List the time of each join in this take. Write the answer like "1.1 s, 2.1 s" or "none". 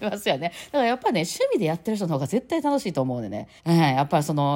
3.6 s